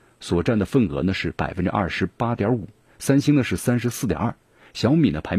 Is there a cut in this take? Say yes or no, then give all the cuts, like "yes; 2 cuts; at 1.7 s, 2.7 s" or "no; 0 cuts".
no; 0 cuts